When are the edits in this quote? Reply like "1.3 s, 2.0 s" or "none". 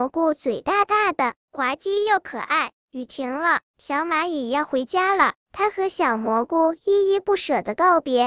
2.8 s